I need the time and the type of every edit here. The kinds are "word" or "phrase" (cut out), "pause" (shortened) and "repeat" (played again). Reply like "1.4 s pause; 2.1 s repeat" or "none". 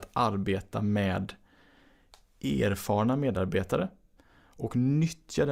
none